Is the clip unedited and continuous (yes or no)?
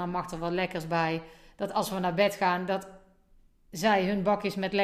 yes